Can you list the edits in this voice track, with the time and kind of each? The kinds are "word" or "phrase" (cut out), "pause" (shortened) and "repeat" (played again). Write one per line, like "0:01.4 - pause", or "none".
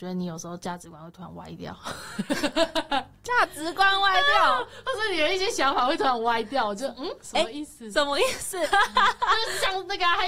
0:08.6 - phrase